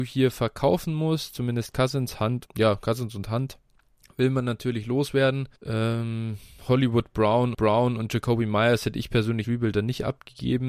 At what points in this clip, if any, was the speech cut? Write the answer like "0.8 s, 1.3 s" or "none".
2.5 s, 5.6 s, 7.5 s, 9.4 s